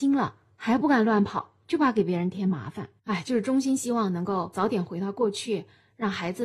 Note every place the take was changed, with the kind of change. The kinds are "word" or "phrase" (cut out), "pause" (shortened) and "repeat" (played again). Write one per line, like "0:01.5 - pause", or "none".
0:03.0 - pause